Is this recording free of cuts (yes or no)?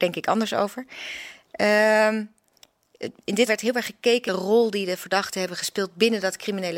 no